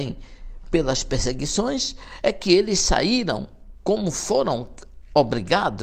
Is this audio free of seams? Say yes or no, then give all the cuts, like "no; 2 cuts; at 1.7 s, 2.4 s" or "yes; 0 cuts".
yes; 0 cuts